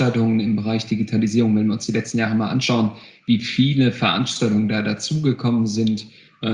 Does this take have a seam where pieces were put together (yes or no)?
no